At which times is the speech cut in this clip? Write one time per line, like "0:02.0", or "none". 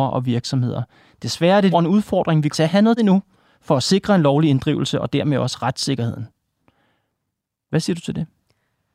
0:01.7
0:02.5
0:03.0